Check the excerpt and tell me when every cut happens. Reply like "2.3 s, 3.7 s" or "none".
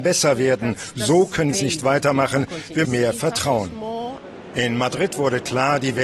1.5 s, 2.8 s